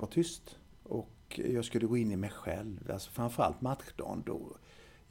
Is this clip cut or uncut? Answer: uncut